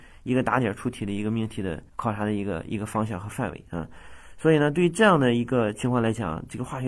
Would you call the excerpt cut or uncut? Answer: cut